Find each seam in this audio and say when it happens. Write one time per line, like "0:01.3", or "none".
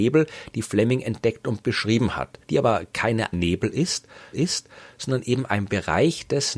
0:02.4
0:03.3
0:04.3